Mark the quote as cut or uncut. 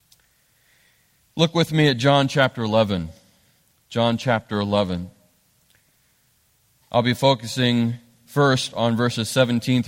uncut